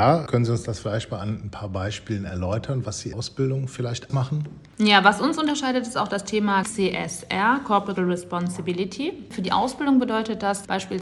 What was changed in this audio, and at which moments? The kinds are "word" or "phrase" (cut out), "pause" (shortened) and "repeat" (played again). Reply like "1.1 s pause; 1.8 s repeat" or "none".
3.1 s word; 4.1 s word; 6.6 s phrase; 8.0 s word